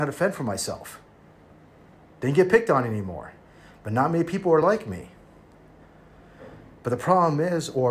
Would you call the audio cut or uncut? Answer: uncut